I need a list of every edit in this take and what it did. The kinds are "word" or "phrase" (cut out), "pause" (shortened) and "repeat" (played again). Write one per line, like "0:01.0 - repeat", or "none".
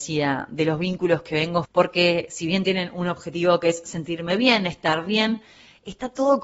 0:01.6 - word